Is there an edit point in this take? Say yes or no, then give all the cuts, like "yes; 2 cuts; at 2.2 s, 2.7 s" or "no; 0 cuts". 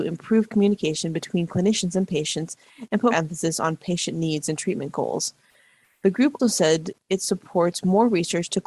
yes; 2 cuts; at 3.1 s, 6.4 s